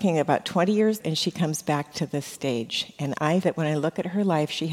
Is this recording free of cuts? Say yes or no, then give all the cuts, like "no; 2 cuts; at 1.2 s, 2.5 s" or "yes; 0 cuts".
no; 2 cuts; at 1.0 s, 3.4 s